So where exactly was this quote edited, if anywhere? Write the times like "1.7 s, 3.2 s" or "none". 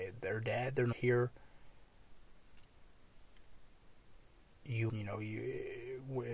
0.9 s, 4.9 s